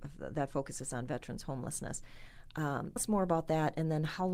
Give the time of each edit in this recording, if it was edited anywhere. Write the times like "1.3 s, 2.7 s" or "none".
3.0 s

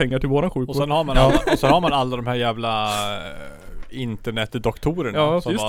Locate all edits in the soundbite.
none

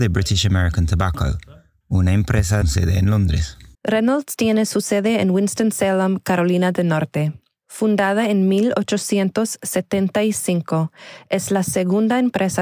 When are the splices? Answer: 2.6 s, 3.7 s

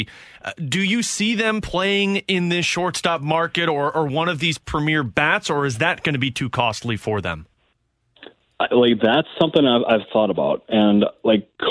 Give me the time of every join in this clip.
none

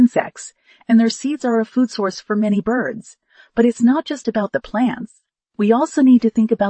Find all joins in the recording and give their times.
none

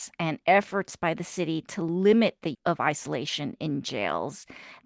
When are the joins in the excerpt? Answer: 2.5 s

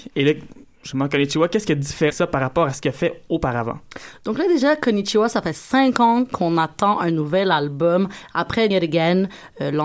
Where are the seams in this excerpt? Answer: 2.1 s, 8.7 s

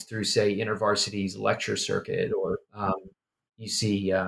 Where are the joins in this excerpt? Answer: 2.6 s

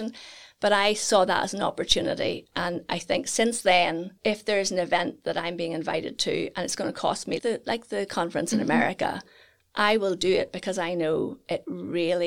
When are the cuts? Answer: 4.2 s, 7.4 s

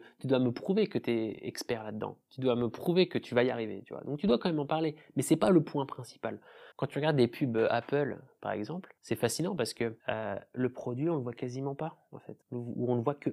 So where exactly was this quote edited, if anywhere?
6.7 s, 9.0 s, 10.0 s, 12.4 s

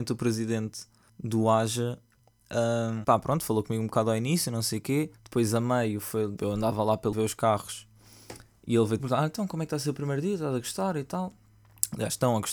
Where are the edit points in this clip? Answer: 1.1 s, 3.0 s, 5.2 s, 6.4 s, 7.1 s, 9.0 s

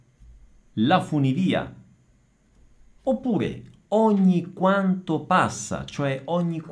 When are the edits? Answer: none

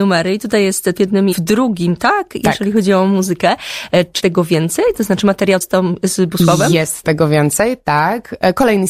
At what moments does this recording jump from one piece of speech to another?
1.0 s, 1.3 s, 4.2 s, 5.6 s, 7.0 s

